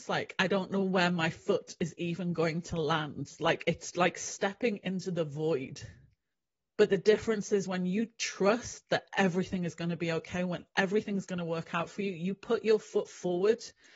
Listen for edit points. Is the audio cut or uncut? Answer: cut